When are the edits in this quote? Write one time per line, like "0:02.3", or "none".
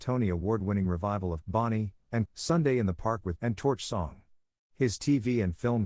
0:01.4
0:02.3
0:03.4